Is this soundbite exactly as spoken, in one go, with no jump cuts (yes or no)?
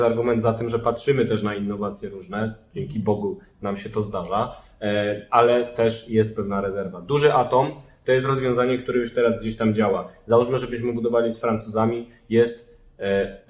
yes